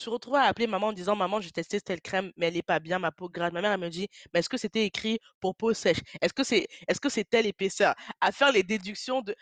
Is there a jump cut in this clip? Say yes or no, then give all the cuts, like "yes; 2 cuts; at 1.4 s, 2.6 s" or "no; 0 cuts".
no; 0 cuts